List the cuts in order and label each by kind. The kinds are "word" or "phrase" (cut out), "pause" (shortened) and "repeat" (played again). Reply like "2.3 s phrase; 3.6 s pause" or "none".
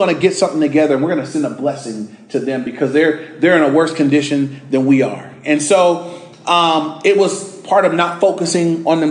none